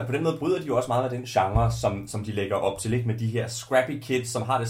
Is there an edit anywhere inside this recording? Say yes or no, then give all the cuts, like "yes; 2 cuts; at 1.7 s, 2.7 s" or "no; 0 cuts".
no; 0 cuts